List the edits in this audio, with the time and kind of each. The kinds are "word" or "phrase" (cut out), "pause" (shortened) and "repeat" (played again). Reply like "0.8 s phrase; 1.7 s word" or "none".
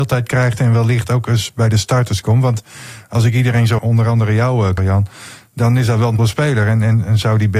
3.8 s word; 4.8 s word; 6.2 s word